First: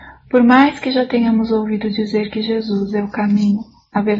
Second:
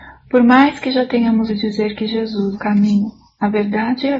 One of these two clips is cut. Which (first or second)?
second